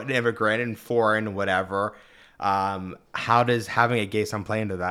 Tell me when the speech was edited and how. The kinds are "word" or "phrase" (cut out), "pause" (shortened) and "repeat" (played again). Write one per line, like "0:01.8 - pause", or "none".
0:03.1 - pause